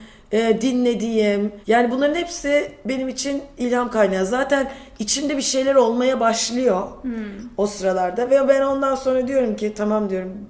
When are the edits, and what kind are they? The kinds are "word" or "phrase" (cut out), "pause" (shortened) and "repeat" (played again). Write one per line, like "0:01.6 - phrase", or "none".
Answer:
0:01.6 - pause